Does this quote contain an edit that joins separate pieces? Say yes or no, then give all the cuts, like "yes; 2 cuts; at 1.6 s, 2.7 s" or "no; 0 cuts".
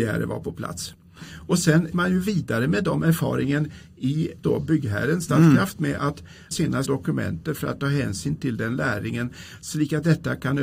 yes; 4 cuts; at 1.9 s, 4.4 s, 6.5 s, 6.8 s